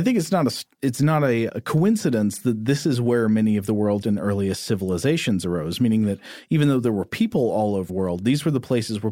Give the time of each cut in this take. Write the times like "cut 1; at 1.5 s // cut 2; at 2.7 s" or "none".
cut 1; at 1.5 s // cut 2; at 4.0 s // cut 3; at 7.9 s